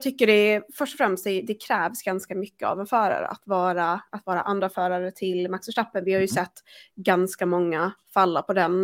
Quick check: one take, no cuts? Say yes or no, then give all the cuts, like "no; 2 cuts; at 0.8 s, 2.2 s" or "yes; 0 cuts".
yes; 0 cuts